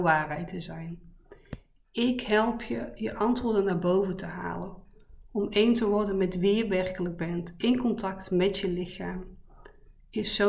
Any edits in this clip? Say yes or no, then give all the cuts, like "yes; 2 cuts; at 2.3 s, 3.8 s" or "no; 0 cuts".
no; 0 cuts